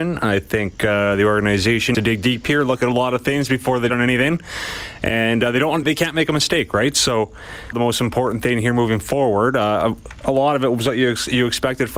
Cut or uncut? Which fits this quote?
cut